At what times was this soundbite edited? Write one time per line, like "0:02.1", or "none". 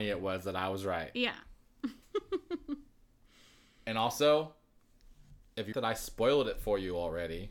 0:05.7

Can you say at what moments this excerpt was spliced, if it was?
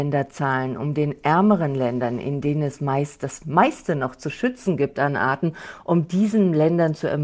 none

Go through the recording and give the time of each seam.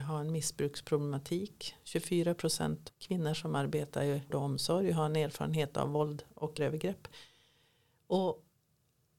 0:02.9
0:04.3
0:06.6

